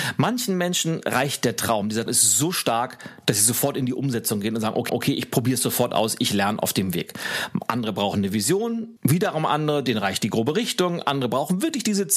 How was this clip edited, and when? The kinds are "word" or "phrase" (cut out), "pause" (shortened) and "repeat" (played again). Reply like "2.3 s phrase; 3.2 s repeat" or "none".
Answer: 2.1 s word; 4.9 s repeat; 9.0 s pause